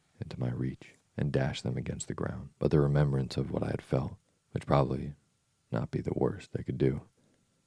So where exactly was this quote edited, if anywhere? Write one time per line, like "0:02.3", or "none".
0:01.0
0:02.5
0:04.4